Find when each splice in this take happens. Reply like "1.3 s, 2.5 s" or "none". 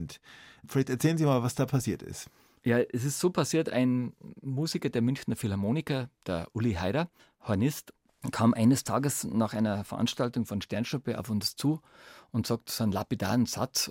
none